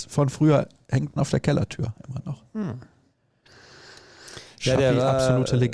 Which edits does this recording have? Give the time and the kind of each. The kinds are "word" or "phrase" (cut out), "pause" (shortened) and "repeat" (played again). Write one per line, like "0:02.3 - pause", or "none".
0:01.2 - phrase